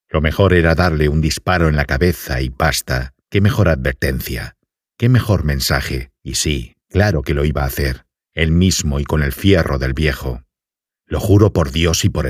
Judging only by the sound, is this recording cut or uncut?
cut